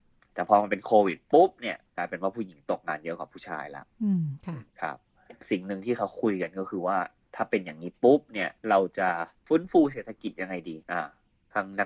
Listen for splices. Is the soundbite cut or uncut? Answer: cut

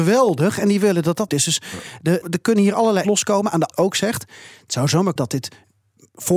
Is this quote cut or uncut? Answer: cut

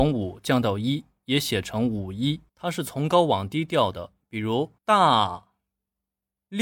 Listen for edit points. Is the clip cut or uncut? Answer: cut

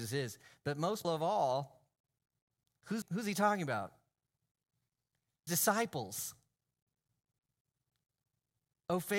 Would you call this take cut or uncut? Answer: cut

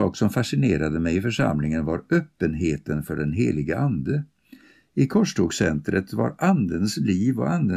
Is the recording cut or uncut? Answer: uncut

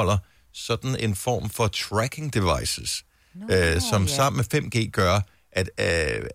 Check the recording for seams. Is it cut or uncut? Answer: uncut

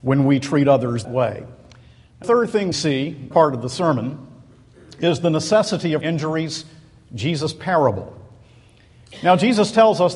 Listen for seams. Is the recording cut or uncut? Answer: cut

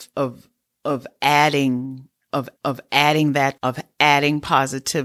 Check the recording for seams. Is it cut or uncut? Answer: cut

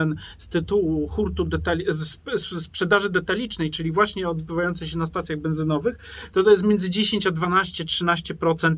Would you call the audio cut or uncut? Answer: uncut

